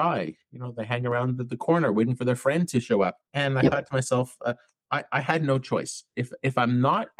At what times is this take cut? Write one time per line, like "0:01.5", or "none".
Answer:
none